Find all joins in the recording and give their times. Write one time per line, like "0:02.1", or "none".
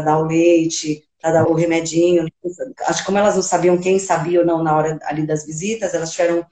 0:01.4
0:02.8